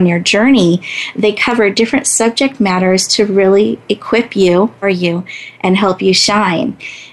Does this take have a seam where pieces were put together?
yes; 1 cut; at 4.8 s

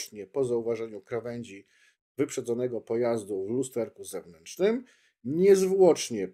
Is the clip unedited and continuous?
yes; 0 cuts

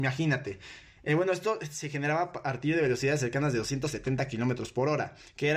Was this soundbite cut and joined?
no; 0 cuts

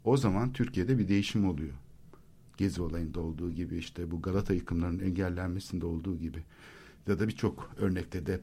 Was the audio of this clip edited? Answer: no; 0 cuts

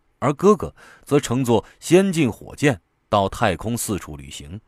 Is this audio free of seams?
yes; 0 cuts

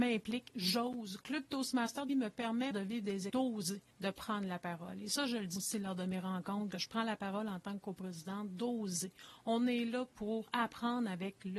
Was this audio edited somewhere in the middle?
yes; 6 cuts; at 2.1 s, 2.7 s, 3.3 s, 3.9 s, 5.6 s, 6.7 s

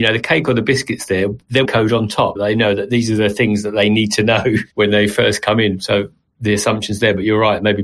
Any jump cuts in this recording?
yes; 3 cuts; at 1.6 s, 2.4 s, 4.7 s

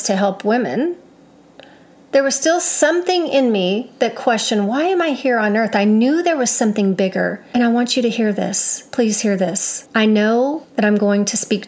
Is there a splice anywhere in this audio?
no; 0 cuts

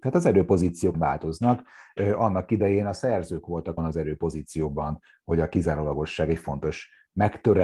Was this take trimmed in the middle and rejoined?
yes; 2 cuts; at 0.9 s, 3.8 s

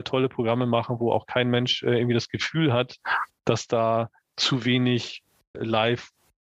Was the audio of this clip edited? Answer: yes; 1 cut; at 5.5 s

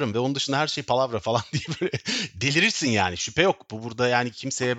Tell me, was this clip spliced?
no; 0 cuts

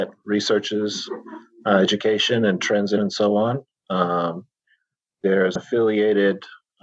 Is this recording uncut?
no; 2 cuts; at 3.0 s, 5.6 s

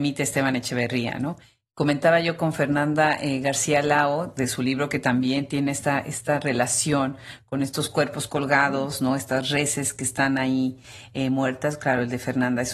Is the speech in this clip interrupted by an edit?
no; 0 cuts

